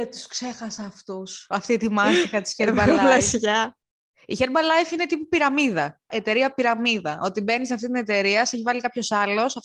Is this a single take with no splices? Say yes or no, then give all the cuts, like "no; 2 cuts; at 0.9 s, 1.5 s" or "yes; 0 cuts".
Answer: yes; 0 cuts